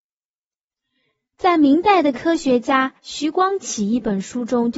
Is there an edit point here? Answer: yes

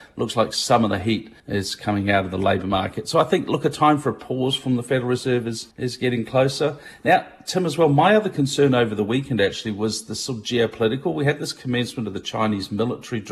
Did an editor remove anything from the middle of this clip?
yes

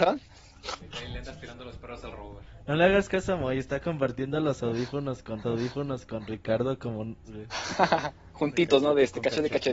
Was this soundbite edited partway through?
yes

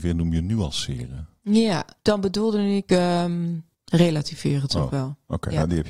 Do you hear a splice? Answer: yes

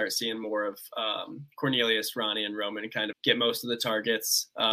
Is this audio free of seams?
no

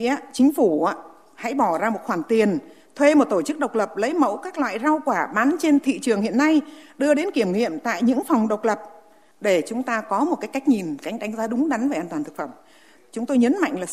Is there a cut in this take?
no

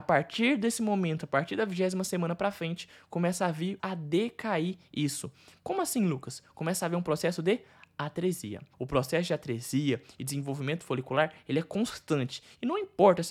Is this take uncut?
no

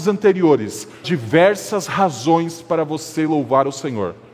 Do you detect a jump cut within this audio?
yes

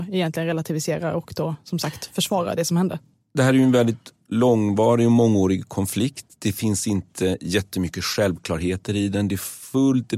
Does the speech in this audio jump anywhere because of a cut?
no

